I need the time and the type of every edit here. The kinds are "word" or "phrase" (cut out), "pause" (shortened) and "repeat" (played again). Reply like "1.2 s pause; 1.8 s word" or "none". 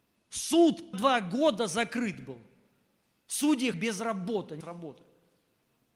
0.9 s word; 3.7 s word; 4.6 s word